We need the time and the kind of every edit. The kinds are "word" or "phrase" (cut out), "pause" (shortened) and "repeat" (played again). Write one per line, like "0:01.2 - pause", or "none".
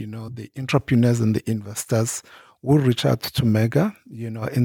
none